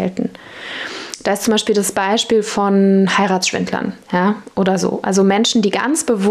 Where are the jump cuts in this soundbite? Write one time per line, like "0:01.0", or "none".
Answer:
0:04.0